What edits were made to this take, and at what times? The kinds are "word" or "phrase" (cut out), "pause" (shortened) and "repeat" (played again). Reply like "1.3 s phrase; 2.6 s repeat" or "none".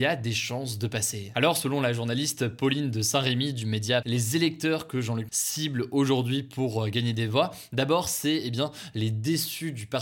4.0 s word; 5.3 s word